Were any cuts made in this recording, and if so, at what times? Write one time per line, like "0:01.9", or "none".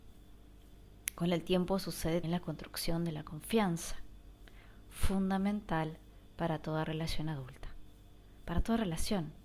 0:02.2